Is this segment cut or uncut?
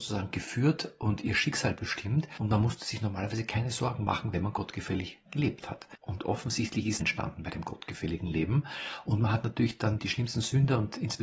cut